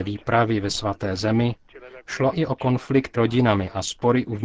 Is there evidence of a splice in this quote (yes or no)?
yes